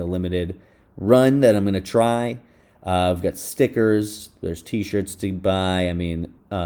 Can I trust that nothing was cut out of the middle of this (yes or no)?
yes